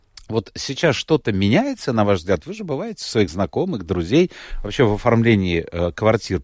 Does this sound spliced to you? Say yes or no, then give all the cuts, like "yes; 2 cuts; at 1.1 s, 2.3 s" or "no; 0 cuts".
no; 0 cuts